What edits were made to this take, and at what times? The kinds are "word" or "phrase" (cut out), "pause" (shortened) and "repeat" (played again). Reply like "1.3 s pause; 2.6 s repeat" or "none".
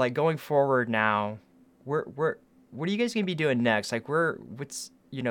1.7 s pause